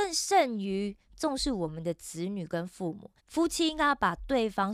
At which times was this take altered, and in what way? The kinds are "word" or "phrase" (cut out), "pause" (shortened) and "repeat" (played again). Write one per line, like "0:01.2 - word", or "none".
0:03.2 - pause